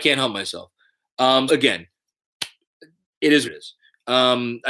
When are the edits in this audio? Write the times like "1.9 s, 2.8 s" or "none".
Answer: 1.5 s, 3.5 s